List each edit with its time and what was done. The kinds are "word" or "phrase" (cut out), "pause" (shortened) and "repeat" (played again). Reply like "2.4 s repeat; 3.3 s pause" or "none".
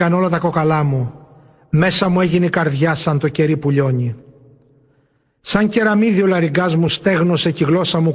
none